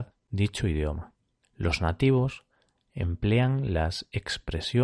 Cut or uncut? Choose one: uncut